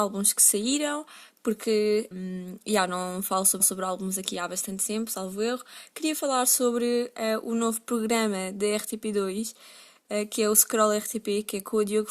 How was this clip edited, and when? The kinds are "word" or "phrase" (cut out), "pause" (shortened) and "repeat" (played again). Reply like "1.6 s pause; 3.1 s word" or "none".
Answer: 2.1 s word; 3.6 s repeat